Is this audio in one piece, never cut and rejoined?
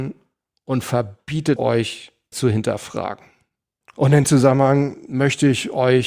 no; 3 cuts; at 1.6 s, 2.3 s, 4.2 s

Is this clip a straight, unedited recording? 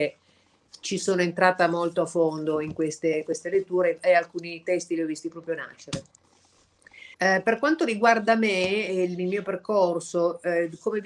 no; 1 cut; at 7.1 s

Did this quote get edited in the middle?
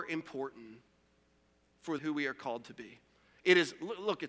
yes; 1 cut; at 2.0 s

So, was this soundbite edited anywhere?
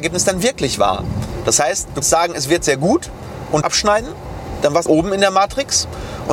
yes; 3 cuts; at 2.0 s, 3.6 s, 4.9 s

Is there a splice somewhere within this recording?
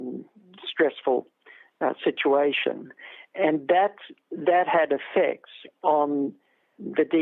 no; 0 cuts

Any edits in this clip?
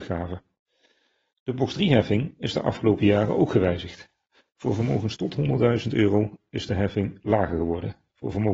no; 0 cuts

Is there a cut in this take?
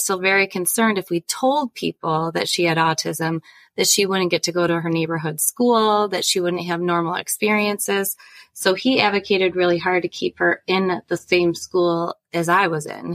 no; 0 cuts

